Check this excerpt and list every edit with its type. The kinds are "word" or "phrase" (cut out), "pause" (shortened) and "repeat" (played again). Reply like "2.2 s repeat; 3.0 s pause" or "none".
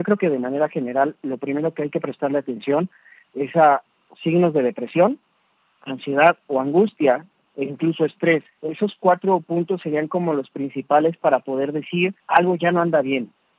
8.5 s pause; 12.2 s pause